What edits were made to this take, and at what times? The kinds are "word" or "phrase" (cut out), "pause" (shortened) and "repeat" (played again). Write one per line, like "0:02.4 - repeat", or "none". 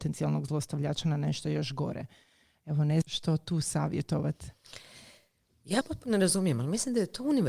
0:03.0 - word
0:05.8 - word

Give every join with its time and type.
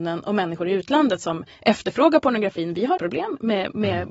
0:03.0 - word

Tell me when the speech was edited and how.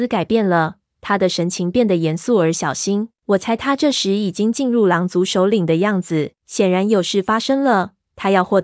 0:03.2 - pause
0:06.4 - pause

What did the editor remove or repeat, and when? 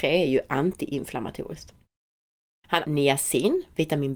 0:02.8 - word

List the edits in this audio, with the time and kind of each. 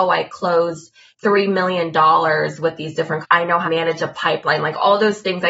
0:03.2 - phrase
0:03.6 - word

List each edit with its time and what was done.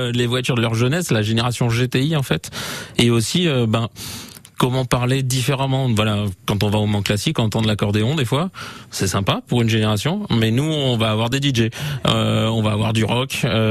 none

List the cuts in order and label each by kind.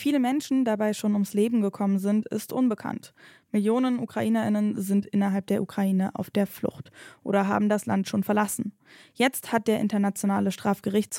none

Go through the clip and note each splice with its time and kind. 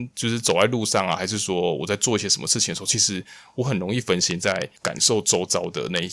0:04.8 - pause

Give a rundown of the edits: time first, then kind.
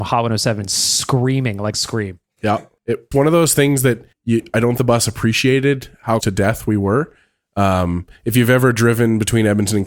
0:01.7 - phrase
0:02.8 - pause
0:03.1 - word
0:04.1 - pause
0:04.8 - phrase
0:06.2 - word

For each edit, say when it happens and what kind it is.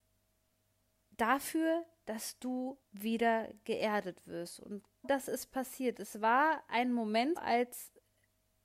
0:02.8 - pause
0:05.0 - word
0:07.4 - word

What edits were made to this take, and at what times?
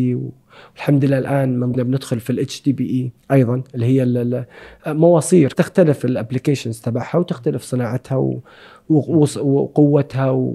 0:01.7 - phrase
0:03.2 - pause
0:05.5 - phrase

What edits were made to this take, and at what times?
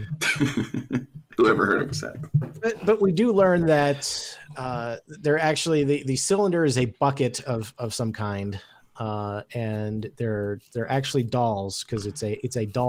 none

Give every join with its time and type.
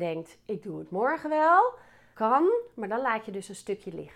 0:02.1 - word

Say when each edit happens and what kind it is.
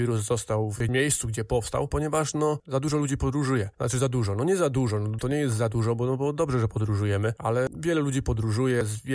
0:03.7 - pause

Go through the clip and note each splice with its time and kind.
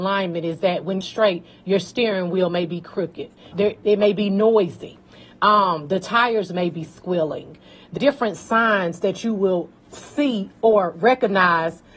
0:01.0 - phrase
0:03.5 - word
0:08.0 - word
0:09.8 - pause

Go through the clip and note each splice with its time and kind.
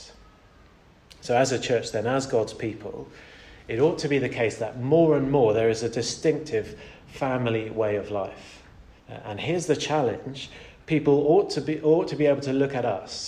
0:09.0 - pause

